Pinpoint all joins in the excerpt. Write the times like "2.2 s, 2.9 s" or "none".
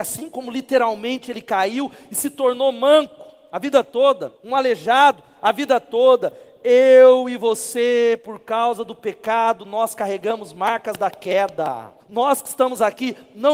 4.4 s, 12.0 s